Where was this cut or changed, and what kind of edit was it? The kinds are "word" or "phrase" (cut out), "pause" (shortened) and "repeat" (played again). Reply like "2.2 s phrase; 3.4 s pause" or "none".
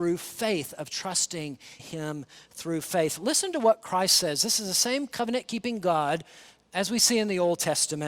1.8 s word